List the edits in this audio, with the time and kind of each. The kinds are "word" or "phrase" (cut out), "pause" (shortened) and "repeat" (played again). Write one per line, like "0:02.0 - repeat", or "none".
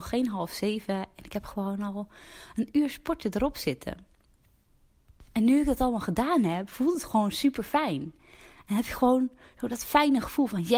none

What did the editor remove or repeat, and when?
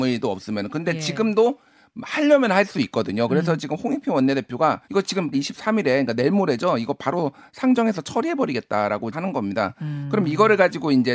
0:04.8 - pause
0:05.3 - phrase
0:09.1 - word

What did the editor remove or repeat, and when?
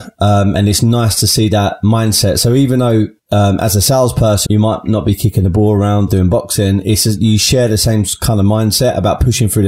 0:03.2 - pause
0:04.5 - word
0:06.1 - word

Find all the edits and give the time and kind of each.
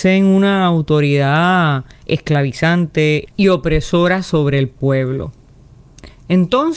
0:03.3 - pause

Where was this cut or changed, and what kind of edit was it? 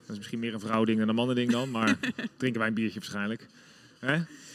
none

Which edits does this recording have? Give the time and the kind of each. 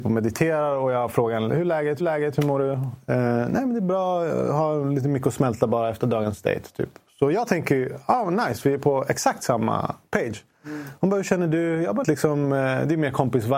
0:02.0 - repeat
0:12.0 - phrase

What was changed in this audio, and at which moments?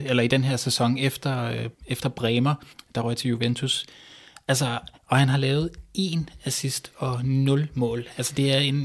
0:01.7 - pause
0:02.7 - pause
0:05.0 - pause

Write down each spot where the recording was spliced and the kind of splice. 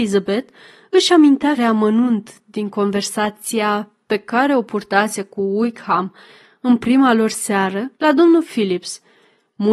0:01.6 - word
0:07.9 - pause

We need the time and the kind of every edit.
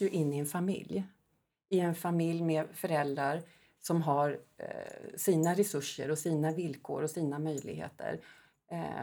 none

